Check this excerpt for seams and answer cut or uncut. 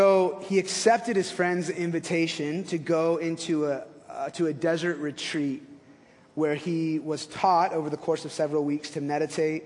uncut